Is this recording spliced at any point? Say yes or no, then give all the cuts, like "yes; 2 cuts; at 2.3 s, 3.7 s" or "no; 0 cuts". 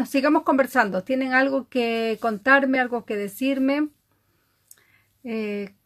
no; 0 cuts